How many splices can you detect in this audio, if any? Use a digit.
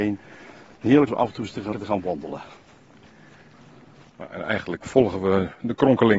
3